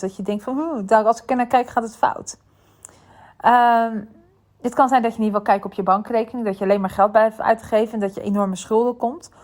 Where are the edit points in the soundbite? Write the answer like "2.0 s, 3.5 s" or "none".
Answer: none